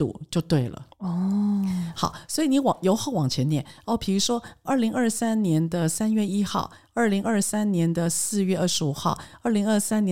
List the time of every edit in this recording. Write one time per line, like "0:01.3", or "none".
0:00.9